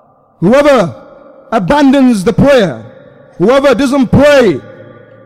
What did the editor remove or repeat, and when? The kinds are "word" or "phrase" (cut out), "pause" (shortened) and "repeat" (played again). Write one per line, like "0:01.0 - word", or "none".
none